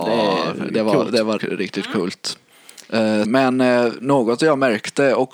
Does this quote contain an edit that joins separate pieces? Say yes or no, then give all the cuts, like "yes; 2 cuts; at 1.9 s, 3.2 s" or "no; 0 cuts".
yes; 2 cuts; at 1.4 s, 3.2 s